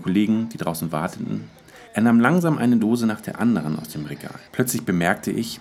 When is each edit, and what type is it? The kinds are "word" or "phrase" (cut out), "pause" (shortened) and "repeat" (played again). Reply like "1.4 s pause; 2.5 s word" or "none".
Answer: 1.9 s pause; 4.5 s pause